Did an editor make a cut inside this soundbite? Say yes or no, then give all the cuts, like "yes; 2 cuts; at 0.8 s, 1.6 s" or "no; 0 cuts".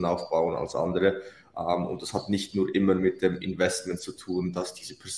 no; 0 cuts